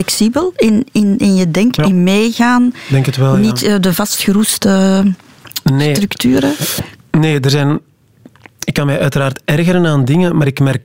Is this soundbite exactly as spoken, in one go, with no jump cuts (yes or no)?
no